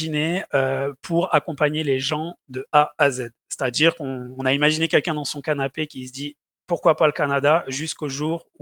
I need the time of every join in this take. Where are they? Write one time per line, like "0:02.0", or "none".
none